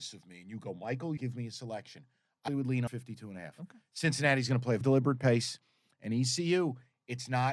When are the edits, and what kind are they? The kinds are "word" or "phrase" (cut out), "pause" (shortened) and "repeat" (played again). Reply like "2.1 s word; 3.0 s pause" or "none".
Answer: 1.2 s word; 2.5 s word; 2.9 s word; 4.8 s word